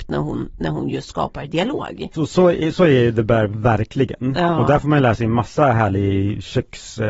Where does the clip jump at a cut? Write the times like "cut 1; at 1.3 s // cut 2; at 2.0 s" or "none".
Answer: none